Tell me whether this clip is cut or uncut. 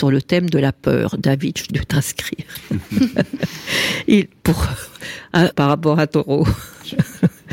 cut